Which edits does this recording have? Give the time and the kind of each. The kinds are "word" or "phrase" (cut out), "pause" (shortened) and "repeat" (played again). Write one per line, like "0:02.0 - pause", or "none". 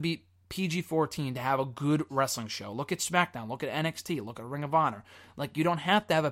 none